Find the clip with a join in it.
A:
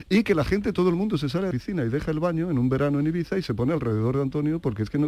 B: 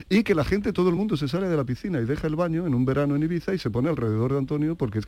A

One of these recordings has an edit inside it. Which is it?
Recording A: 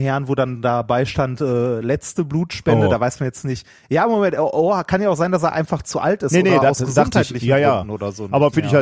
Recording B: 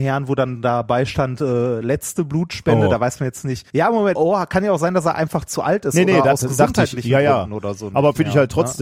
B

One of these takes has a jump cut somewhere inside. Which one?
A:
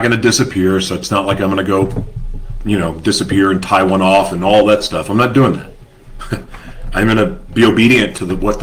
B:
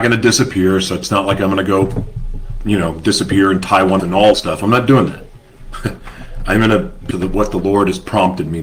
B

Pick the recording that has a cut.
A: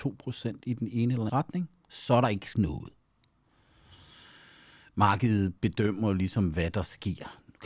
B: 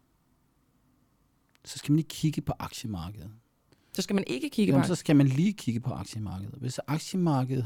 A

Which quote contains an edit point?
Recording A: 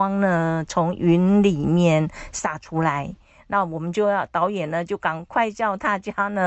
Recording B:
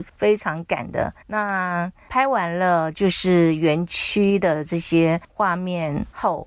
B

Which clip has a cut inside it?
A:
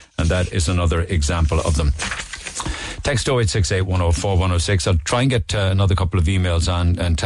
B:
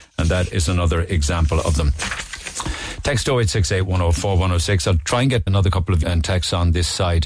B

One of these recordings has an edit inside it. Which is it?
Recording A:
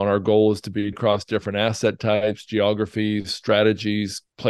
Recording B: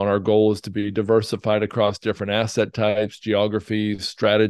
A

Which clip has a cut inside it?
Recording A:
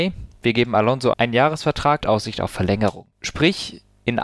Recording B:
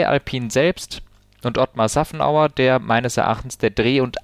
A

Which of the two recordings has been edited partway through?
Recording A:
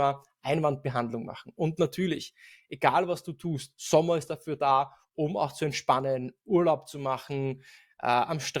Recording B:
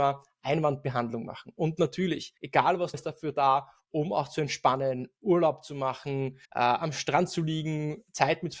B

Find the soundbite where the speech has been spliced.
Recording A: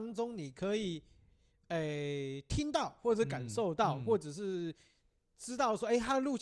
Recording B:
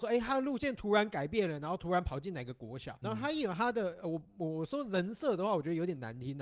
B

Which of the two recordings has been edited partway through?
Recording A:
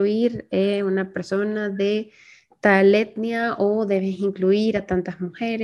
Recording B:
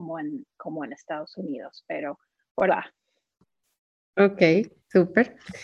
B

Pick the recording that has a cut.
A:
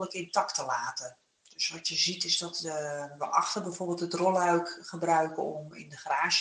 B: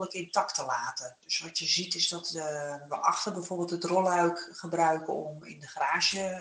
B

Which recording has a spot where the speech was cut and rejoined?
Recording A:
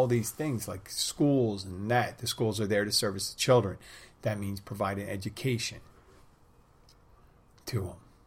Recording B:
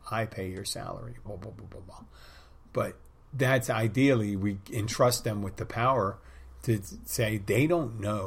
B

